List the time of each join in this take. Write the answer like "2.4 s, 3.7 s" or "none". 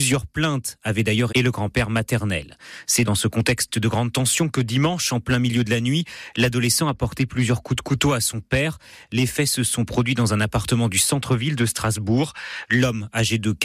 1.3 s, 3.1 s